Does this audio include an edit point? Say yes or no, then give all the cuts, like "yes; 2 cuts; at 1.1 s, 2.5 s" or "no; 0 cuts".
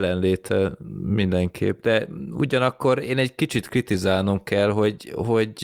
no; 0 cuts